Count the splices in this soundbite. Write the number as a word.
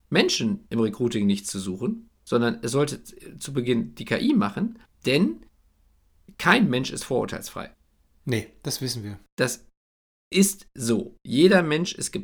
one